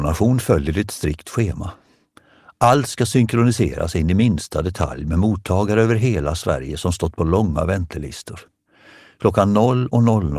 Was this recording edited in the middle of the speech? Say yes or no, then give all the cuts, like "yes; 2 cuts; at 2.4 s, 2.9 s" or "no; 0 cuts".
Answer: no; 0 cuts